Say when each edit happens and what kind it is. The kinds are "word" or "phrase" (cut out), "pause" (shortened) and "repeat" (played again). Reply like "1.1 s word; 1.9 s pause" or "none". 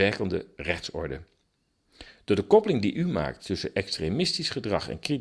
none